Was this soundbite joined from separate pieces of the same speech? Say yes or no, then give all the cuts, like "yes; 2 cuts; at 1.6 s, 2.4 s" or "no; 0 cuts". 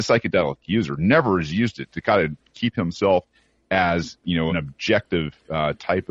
yes; 1 cut; at 4.5 s